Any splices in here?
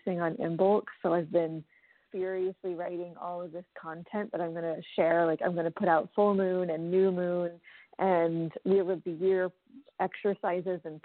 yes; 1 cut; at 2.1 s

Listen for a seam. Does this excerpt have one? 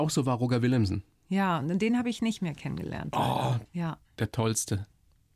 no; 0 cuts

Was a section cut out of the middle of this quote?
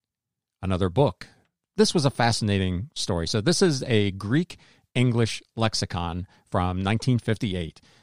no; 0 cuts

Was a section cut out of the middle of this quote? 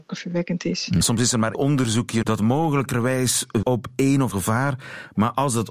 yes; 5 cuts; at 1.0 s, 1.5 s, 2.2 s, 3.6 s, 4.3 s

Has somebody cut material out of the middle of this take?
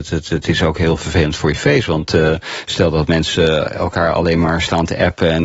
no; 0 cuts

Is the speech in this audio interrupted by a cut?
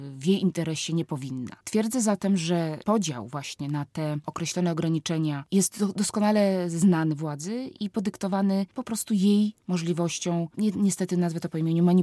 no; 0 cuts

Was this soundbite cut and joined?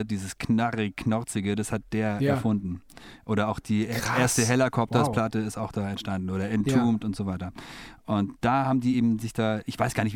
no; 0 cuts

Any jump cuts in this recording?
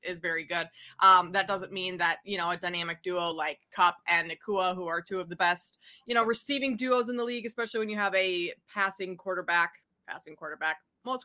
no; 0 cuts

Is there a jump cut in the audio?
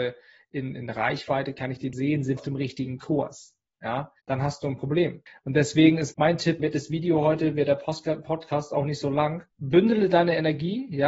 yes; 7 cuts; at 1.9 s, 2.4 s, 4.2 s, 5.3 s, 6.1 s, 6.6 s, 9.5 s

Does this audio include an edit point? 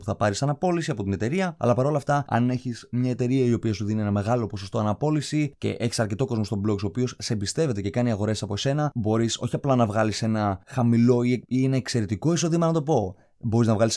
no; 0 cuts

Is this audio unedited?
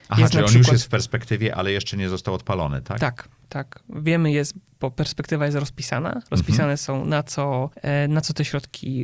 yes; 0 cuts

